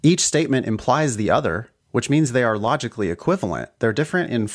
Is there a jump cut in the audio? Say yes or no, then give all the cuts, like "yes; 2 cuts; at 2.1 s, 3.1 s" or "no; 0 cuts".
yes; 1 cut; at 1.8 s